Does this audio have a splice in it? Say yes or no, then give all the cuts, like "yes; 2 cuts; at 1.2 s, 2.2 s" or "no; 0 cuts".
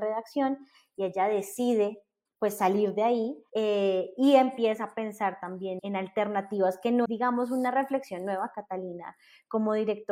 yes; 4 cuts; at 2.3 s, 3.5 s, 5.8 s, 7.0 s